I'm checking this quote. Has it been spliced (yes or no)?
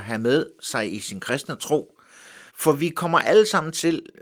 yes